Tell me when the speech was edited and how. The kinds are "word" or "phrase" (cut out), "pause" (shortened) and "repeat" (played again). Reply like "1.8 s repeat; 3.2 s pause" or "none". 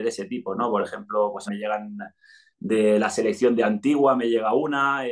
1.5 s word